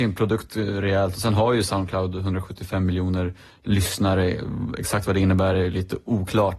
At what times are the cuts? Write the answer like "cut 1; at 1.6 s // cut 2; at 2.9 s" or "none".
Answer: none